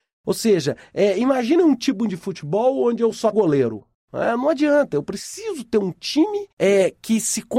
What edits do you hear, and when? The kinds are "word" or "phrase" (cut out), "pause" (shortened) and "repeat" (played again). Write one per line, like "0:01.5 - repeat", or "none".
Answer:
0:03.3 - word
0:06.5 - pause